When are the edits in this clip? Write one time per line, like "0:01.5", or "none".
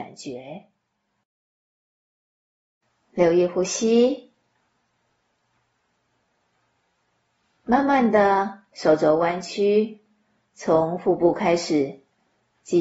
none